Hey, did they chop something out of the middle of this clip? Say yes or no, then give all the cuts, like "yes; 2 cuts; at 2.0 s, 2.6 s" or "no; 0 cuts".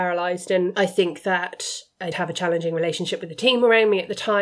yes; 1 cut; at 2.1 s